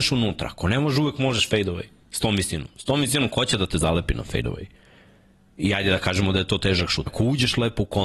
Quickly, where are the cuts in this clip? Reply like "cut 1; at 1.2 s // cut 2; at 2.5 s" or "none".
cut 1; at 7.1 s